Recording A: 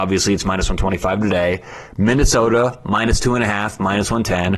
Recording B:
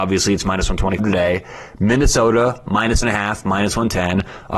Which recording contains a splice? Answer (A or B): B